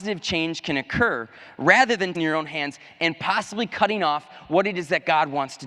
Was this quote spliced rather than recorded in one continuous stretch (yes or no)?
yes